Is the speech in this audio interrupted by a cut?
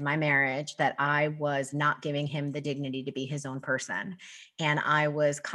no; 0 cuts

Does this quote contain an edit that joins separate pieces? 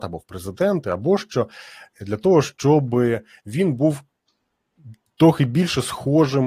no; 0 cuts

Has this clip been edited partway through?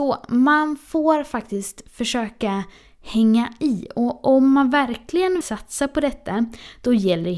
yes; 1 cut; at 5.4 s

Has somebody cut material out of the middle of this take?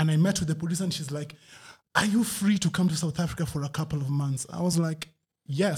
no; 0 cuts

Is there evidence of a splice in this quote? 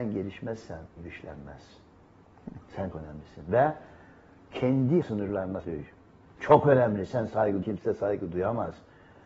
yes; 5 cuts; at 1.0 s, 2.9 s, 5.0 s, 5.6 s, 7.6 s

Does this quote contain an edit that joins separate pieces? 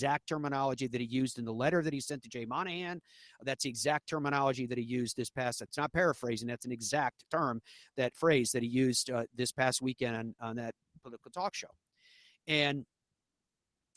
no; 0 cuts

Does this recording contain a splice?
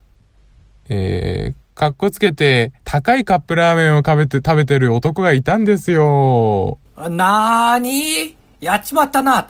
yes; 1 cut; at 2.8 s

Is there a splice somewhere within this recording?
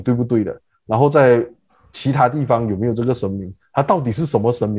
no; 0 cuts

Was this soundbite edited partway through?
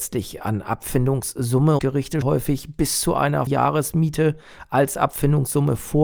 yes; 3 cuts; at 1.8 s, 2.2 s, 3.5 s

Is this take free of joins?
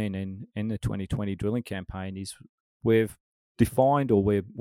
no; 1 cut; at 3.3 s

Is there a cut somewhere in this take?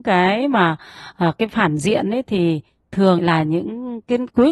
yes; 2 cuts; at 1.5 s, 3.2 s

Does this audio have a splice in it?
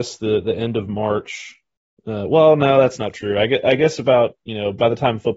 no; 0 cuts

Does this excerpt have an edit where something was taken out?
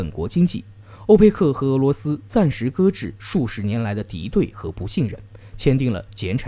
no; 0 cuts

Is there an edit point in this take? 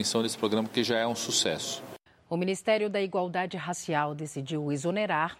yes; 1 cut; at 2.1 s

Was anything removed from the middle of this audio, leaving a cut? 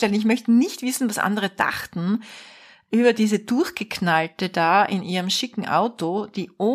no; 0 cuts

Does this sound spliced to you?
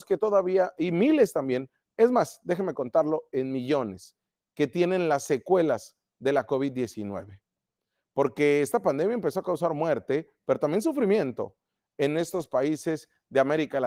no; 0 cuts

